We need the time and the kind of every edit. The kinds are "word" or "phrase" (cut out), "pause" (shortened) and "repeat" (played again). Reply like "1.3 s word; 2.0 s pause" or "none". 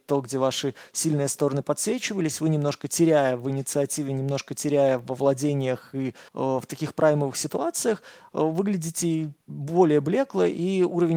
6.3 s pause; 9.4 s pause